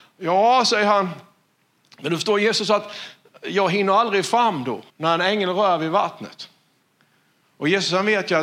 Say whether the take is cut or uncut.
cut